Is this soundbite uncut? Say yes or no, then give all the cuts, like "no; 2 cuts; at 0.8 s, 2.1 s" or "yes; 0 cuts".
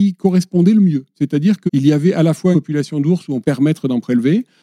no; 3 cuts; at 1.7 s, 2.5 s, 3.4 s